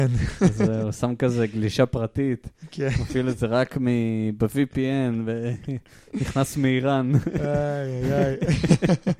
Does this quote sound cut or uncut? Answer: uncut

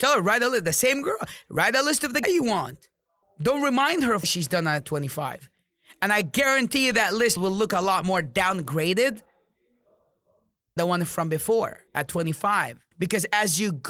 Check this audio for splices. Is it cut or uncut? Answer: cut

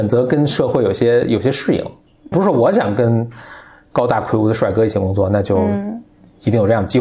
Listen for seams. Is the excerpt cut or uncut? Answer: cut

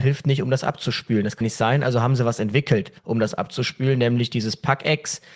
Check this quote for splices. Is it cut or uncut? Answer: cut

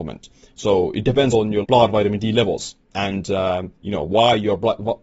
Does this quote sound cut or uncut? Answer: cut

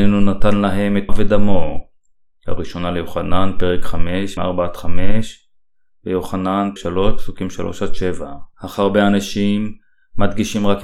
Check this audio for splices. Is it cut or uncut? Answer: cut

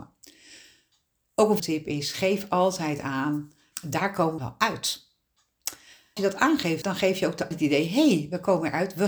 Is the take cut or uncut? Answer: cut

